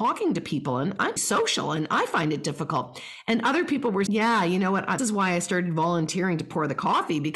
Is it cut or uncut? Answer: cut